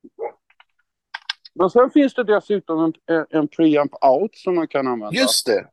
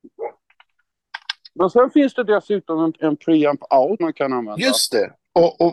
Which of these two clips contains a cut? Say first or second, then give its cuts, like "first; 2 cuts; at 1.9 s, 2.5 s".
second; 2 cuts; at 3.0 s, 4.0 s